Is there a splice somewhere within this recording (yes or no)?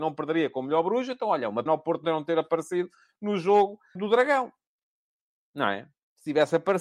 yes